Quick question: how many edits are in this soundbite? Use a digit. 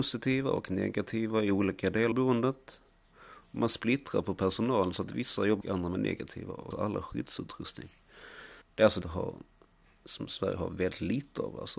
5